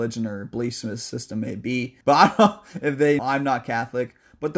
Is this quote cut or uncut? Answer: cut